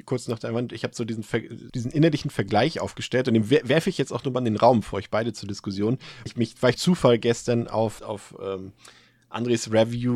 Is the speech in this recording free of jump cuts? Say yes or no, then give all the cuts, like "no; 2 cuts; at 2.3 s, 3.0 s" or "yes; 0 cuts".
no; 4 cuts; at 1.7 s, 6.3 s, 6.8 s, 8.0 s